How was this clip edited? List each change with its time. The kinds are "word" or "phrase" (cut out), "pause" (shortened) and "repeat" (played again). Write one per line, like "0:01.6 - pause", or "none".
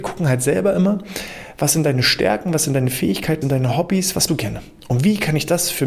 0:03.4 - word
0:04.3 - word